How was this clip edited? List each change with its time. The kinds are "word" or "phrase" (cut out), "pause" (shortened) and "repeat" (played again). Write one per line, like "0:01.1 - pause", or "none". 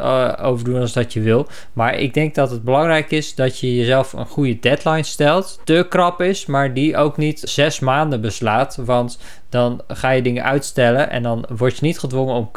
0:05.6 - phrase
0:07.5 - word